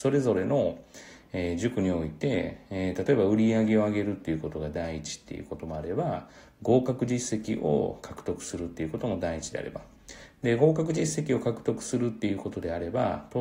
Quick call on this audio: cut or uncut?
uncut